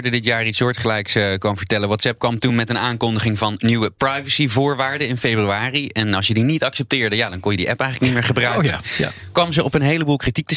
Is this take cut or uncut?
uncut